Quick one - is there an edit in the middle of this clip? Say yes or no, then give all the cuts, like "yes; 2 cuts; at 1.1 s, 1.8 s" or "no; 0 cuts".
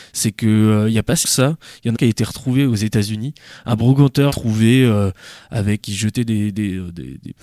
yes; 4 cuts; at 1.2 s, 1.9 s, 4.3 s, 5.8 s